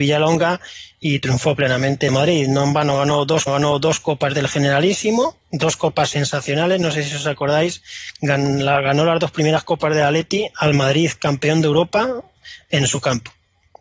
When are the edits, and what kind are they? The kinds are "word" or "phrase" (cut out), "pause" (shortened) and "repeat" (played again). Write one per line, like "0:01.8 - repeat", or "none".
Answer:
0:02.1 - phrase
0:03.5 - repeat
0:05.4 - pause